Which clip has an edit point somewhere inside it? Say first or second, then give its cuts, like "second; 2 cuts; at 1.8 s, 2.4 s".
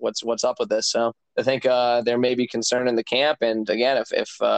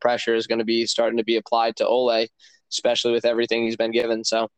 first; 1 cut; at 1.2 s